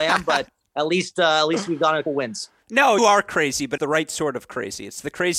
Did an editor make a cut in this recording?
yes; 3 cuts; at 2.0 s, 3.0 s, 3.8 s

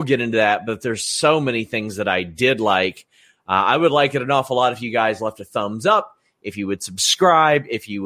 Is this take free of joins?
yes; 0 cuts

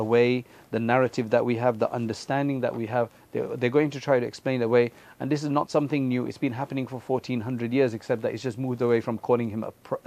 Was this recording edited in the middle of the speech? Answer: no; 0 cuts

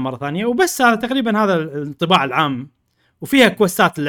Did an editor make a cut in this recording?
no; 0 cuts

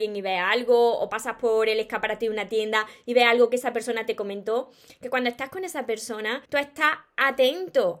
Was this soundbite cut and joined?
yes; 1 cut; at 6.4 s

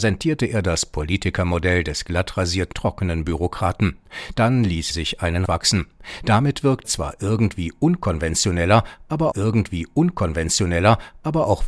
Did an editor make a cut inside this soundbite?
yes; 5 cuts; at 2.7 s, 4.9 s, 5.5 s, 6.8 s, 9.3 s

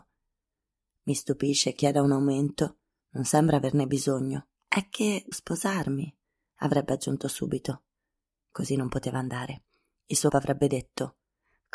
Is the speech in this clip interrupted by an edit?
yes; 4 cuts; at 1.8 s, 4.6 s, 5.3 s, 10.3 s

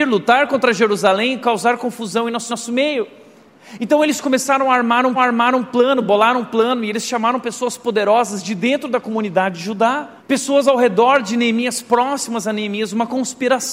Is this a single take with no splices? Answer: no; 3 cuts; at 2.5 s, 5.2 s, 10.2 s

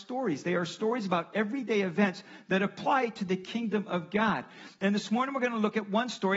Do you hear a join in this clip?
no; 0 cuts

